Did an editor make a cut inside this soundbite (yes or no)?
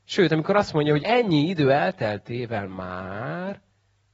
yes